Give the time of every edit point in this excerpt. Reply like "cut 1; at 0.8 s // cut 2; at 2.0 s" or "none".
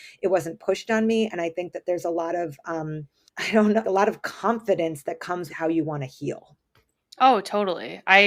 cut 1; at 3.3 s // cut 2; at 3.8 s // cut 3; at 5.5 s